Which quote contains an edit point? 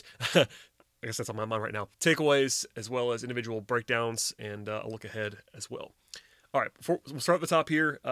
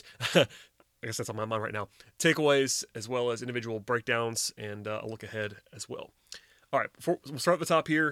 first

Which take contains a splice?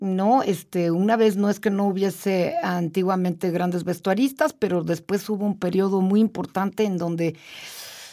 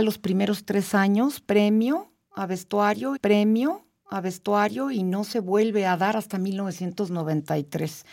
second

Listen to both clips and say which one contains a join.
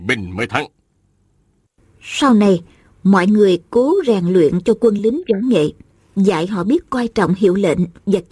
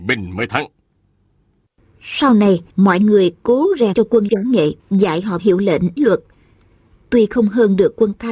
second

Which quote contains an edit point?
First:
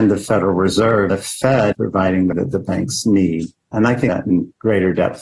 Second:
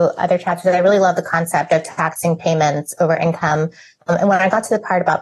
first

